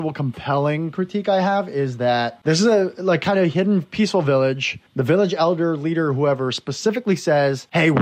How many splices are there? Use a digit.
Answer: 1